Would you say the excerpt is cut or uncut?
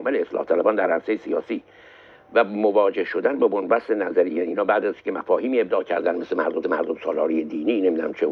cut